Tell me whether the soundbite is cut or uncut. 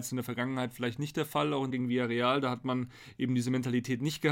cut